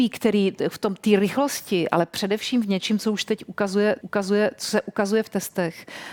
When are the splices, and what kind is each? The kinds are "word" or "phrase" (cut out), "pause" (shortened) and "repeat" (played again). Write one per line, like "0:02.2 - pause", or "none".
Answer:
0:04.0 - repeat